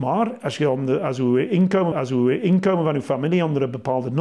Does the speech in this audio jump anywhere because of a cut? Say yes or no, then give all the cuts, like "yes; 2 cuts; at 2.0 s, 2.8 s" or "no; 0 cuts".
yes; 1 cut; at 1.9 s